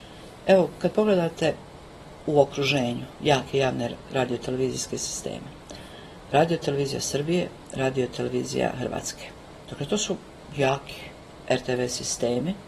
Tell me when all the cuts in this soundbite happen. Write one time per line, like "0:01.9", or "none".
none